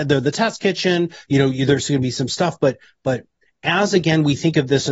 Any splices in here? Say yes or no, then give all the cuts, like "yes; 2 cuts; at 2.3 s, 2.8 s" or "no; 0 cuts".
no; 0 cuts